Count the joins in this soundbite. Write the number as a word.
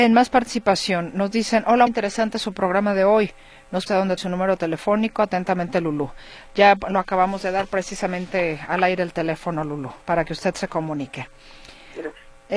four